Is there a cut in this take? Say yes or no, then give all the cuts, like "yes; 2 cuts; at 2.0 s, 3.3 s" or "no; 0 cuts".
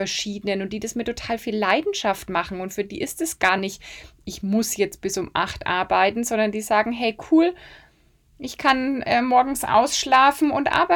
no; 0 cuts